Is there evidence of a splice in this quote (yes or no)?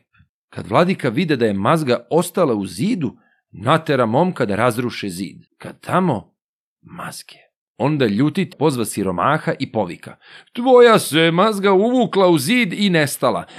yes